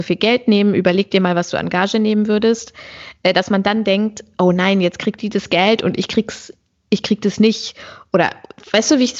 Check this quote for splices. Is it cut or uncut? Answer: uncut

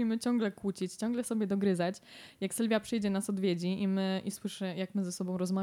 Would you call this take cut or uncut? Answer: uncut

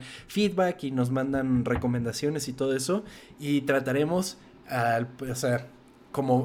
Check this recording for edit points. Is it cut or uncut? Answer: uncut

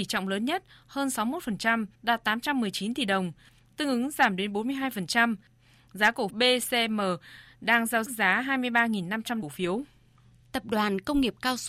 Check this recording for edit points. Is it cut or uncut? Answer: cut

